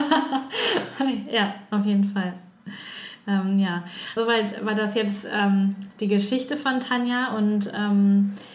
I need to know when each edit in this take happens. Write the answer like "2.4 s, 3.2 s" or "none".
4.2 s